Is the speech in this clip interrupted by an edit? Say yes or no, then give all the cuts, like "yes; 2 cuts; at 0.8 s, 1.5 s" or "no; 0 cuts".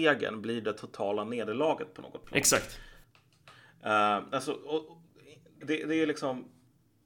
yes; 1 cut; at 5.6 s